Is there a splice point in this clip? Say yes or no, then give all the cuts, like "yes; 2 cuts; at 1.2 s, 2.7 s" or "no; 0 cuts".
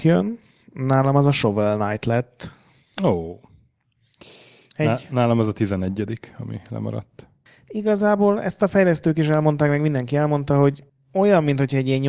no; 0 cuts